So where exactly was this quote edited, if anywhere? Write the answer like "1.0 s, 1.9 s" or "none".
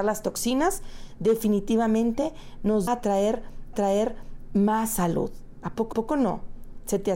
2.9 s, 3.7 s, 5.9 s

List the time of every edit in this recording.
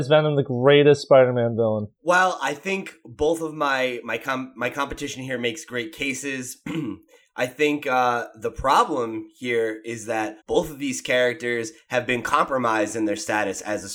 10.4 s

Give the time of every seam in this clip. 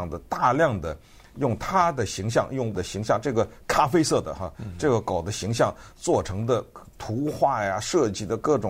2.7 s

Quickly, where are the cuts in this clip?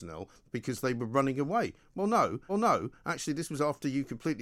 2.5 s

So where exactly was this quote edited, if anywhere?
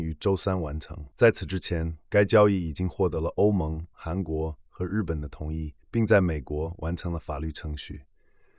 1.1 s, 3.9 s, 5.8 s

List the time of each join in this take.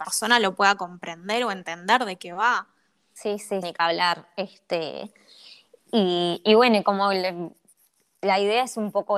3.6 s

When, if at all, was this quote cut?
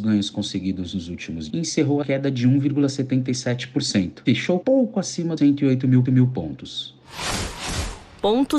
1.5 s, 2.0 s, 4.6 s, 5.4 s, 6.1 s

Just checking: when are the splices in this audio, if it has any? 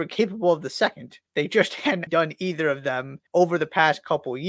1.3 s, 2.1 s, 3.3 s

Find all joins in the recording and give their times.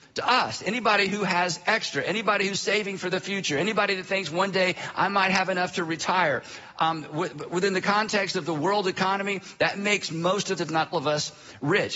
10.6 s, 10.9 s

